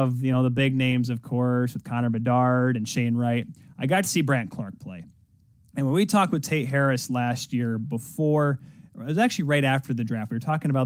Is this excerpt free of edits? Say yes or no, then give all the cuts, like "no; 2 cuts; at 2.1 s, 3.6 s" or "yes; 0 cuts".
yes; 0 cuts